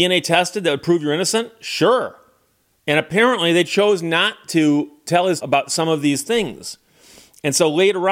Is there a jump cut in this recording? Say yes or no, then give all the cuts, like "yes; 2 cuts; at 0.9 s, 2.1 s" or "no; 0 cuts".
yes; 1 cut; at 5.4 s